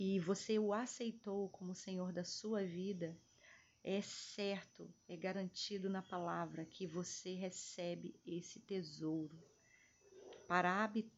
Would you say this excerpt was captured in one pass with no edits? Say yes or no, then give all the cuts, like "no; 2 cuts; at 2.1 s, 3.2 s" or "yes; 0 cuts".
yes; 0 cuts